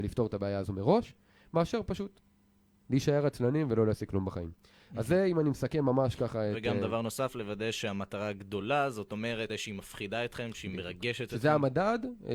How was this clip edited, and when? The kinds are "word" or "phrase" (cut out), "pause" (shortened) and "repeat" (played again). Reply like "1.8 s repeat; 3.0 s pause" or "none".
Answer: 9.5 s word